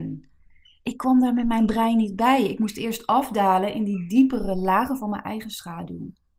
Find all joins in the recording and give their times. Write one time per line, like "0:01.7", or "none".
none